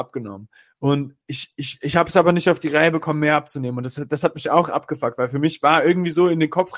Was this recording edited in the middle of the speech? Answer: no; 0 cuts

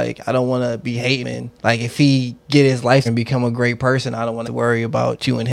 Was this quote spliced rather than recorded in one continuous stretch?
yes; 4 cuts; at 1.2 s, 1.6 s, 3.1 s, 4.4 s

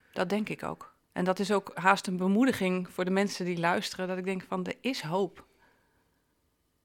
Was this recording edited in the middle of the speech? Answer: yes; 1 cut; at 1.0 s

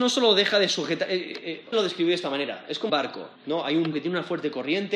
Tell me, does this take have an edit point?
yes; 4 cuts; at 1.7 s, 2.9 s, 3.4 s, 3.9 s

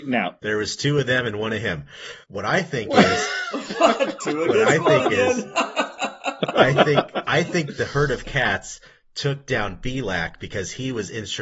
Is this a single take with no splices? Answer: yes; 0 cuts

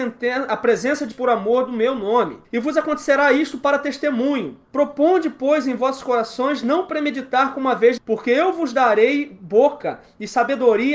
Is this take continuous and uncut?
no; 4 cuts; at 1.1 s, 2.4 s, 4.6 s, 8.0 s

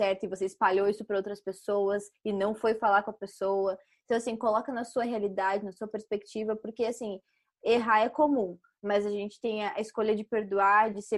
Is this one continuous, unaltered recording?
yes; 0 cuts

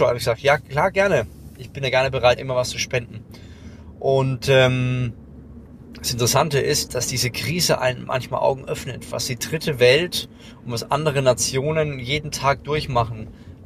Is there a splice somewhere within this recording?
yes; 2 cuts; at 2.4 s, 6.9 s

